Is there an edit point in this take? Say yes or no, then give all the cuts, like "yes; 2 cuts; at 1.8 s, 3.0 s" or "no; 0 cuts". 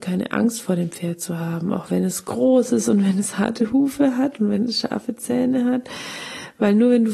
no; 0 cuts